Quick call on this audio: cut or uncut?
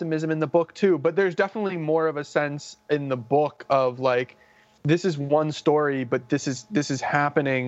uncut